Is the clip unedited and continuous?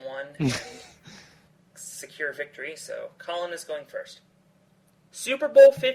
yes; 0 cuts

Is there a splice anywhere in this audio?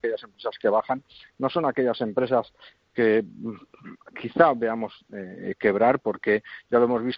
no; 0 cuts

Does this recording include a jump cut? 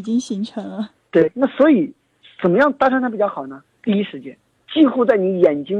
no; 0 cuts

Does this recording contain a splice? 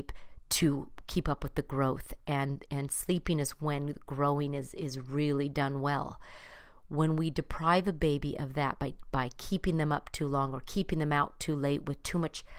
no; 0 cuts

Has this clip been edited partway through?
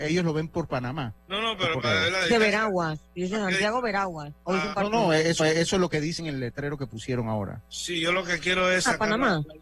yes; 5 cuts; at 1.2 s, 1.8 s, 4.4 s, 5.4 s, 6.2 s

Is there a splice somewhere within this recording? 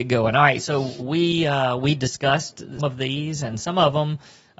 yes; 2 cuts; at 1.0 s, 2.8 s

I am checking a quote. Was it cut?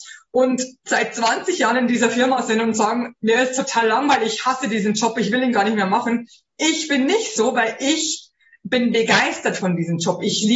no; 0 cuts

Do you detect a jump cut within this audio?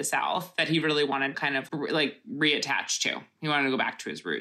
yes; 2 cuts; at 1.3 s, 1.7 s

